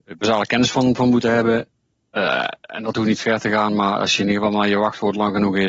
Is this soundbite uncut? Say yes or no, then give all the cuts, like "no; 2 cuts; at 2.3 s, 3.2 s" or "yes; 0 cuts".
yes; 0 cuts